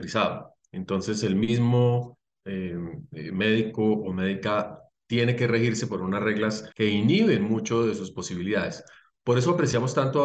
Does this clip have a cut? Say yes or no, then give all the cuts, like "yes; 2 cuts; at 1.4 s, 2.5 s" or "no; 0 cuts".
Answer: yes; 1 cut; at 6.7 s